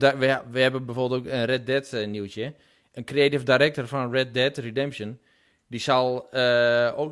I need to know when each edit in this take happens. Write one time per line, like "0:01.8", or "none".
none